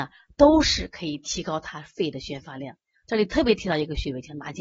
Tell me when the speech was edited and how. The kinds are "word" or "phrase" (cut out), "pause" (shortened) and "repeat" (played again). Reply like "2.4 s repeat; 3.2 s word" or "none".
none